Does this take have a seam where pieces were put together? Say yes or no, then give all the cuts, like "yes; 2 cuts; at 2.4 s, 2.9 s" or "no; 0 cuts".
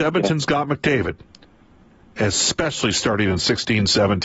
no; 0 cuts